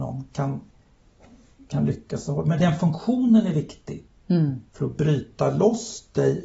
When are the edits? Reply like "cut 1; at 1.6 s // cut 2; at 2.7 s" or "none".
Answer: cut 1; at 4.7 s

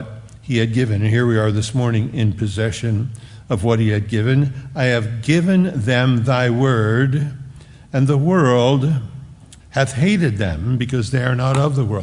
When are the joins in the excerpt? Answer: cut 1; at 9.6 s

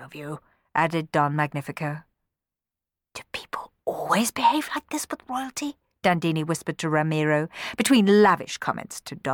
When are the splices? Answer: none

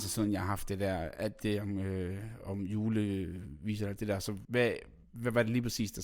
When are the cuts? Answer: cut 1; at 4.4 s

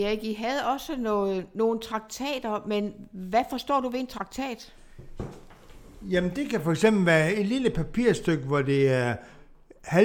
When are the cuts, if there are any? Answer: none

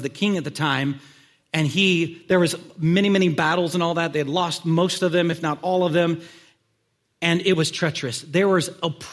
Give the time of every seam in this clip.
none

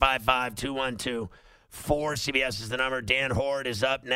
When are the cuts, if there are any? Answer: none

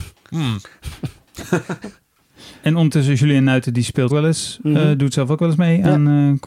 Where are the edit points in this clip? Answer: cut 1; at 4.1 s

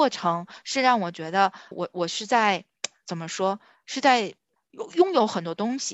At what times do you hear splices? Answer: cut 1; at 1.7 s

